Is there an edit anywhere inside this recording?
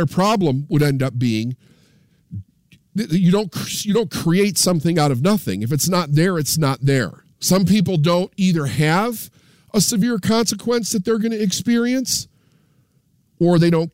yes; 1 cut; at 7.3 s

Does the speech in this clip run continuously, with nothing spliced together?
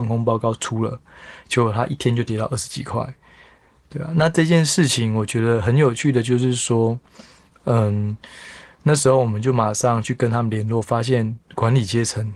yes; 0 cuts

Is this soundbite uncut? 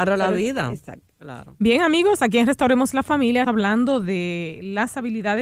no; 1 cut; at 3.4 s

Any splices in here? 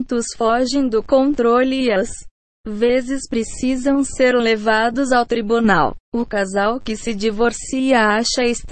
yes; 1 cut; at 6.0 s

